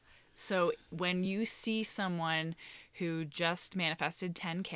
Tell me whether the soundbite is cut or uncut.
uncut